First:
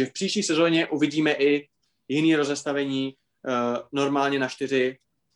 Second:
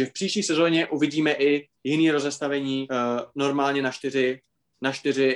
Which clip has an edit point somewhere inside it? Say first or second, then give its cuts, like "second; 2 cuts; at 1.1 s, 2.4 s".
second; 2 cuts; at 1.8 s, 2.9 s